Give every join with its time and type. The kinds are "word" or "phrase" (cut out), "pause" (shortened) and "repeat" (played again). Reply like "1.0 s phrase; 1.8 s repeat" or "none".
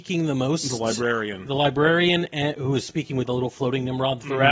3.3 s word

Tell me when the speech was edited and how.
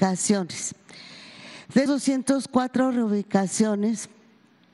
1.9 s word

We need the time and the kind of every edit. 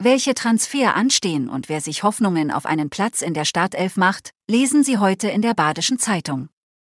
none

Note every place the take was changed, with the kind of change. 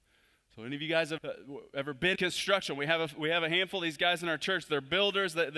1.2 s word; 2.1 s word

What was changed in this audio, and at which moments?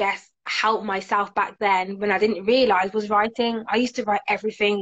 none

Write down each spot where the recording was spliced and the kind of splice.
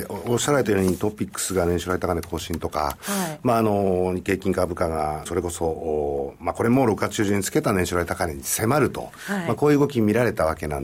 5.3 s word

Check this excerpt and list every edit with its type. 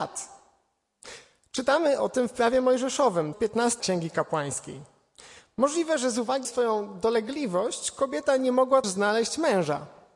3.3 s word; 3.8 s word; 6.4 s word; 8.8 s word

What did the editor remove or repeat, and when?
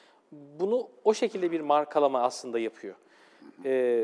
none

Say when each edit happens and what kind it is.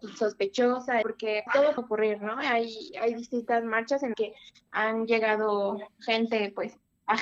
1.0 s word; 1.5 s word; 1.8 s phrase; 4.1 s word

